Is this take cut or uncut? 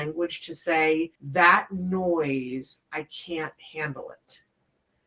cut